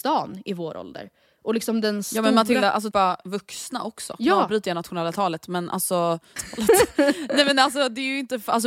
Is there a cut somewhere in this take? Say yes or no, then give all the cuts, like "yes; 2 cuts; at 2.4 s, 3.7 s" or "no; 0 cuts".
yes; 2 cuts; at 2.9 s, 6.4 s